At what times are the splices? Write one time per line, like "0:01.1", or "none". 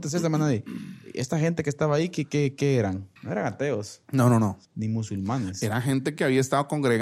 0:03.2
0:04.6